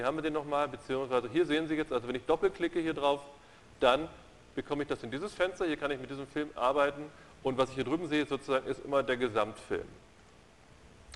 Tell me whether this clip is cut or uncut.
uncut